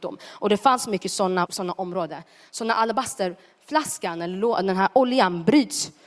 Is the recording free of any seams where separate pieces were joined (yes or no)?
no